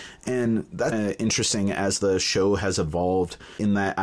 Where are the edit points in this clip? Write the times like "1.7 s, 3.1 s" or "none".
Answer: 0.9 s